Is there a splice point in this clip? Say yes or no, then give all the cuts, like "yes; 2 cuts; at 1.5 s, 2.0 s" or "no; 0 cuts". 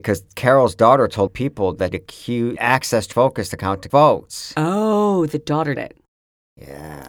yes; 6 cuts; at 1.3 s, 1.9 s, 2.6 s, 3.1 s, 3.9 s, 5.7 s